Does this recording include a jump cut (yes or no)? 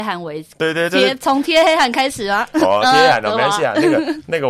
no